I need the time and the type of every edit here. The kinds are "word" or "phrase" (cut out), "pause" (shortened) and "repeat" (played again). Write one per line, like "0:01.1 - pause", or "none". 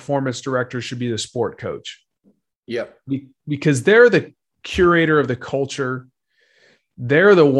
0:02.3 - pause

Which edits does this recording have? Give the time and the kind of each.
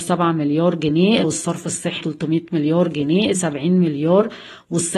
0:01.2 - word
0:02.0 - word
0:03.3 - word

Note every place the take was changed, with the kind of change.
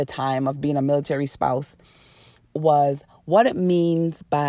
none

